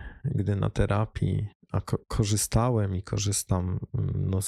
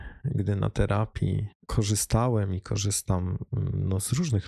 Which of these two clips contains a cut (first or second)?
second